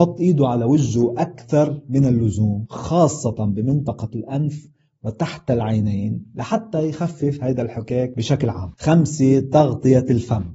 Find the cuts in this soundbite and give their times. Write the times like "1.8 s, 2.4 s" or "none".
none